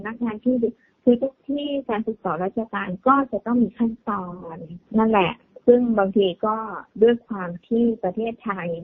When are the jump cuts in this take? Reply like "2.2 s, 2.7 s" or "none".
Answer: 4.9 s